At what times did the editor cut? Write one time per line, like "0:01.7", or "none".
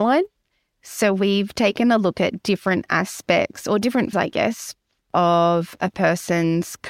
0:04.1